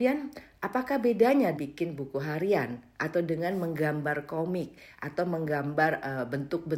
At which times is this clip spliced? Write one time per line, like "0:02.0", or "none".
0:01.5